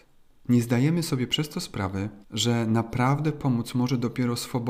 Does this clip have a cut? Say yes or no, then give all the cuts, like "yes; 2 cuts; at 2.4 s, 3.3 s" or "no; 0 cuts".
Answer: yes; 1 cut; at 2.2 s